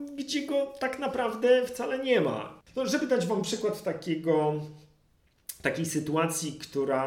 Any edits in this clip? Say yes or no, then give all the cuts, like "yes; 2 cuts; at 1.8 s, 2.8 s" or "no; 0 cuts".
no; 0 cuts